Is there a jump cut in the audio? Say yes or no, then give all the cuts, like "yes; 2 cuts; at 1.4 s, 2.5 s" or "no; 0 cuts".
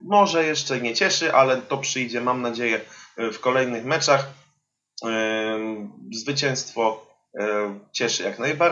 no; 0 cuts